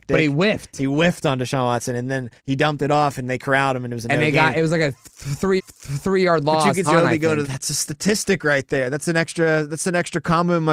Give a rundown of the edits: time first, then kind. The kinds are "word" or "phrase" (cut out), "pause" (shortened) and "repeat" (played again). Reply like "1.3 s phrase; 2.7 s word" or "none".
2.4 s pause; 5.6 s repeat; 6.8 s phrase; 7.4 s phrase